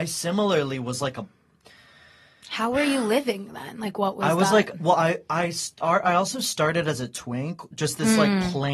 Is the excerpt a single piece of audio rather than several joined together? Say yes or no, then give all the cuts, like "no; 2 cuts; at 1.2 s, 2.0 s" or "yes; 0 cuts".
yes; 0 cuts